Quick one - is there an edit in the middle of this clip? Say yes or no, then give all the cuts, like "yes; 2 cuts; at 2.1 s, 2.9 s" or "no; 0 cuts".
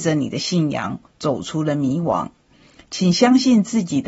no; 0 cuts